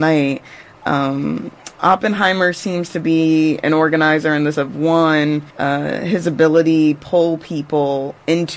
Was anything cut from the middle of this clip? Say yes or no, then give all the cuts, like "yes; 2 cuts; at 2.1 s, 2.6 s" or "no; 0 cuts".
yes; 3 cuts; at 4.5 s, 5.5 s, 6.9 s